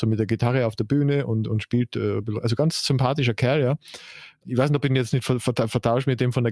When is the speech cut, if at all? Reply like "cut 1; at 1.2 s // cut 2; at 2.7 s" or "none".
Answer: none